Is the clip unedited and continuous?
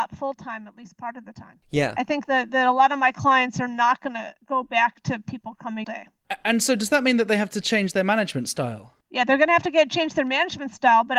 no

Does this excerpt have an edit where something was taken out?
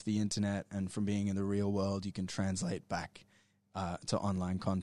no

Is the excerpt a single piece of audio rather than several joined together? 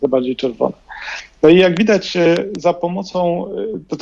yes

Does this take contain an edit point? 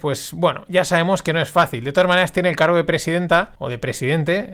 yes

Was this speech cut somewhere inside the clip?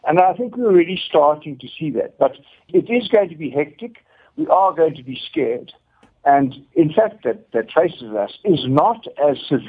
yes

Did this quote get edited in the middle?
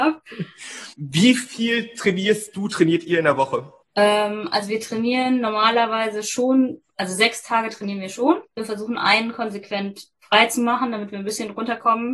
yes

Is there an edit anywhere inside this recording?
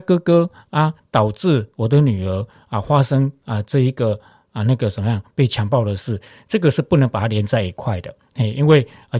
no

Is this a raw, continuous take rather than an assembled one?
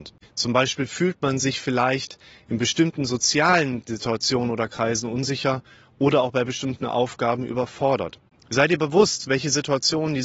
yes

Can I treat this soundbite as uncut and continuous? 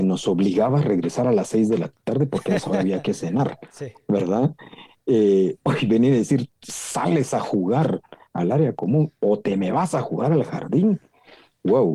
yes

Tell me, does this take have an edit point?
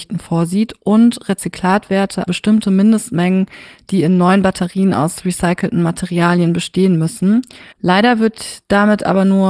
yes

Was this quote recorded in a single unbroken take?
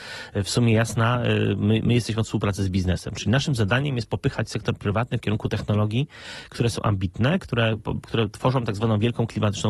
yes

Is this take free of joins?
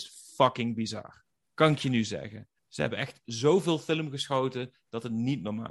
no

